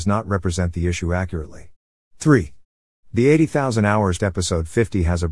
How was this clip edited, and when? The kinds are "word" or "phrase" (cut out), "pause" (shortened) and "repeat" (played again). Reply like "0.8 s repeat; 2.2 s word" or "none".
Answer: 4.2 s word